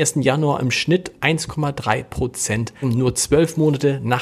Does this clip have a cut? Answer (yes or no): yes